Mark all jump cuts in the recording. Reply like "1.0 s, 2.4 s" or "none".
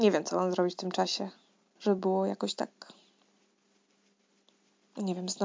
none